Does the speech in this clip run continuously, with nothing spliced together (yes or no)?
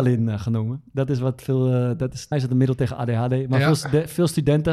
no